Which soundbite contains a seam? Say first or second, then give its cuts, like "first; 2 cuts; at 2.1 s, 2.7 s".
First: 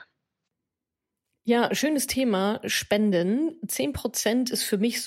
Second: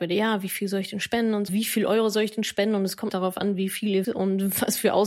second; 3 cuts; at 1.5 s, 3.1 s, 4.0 s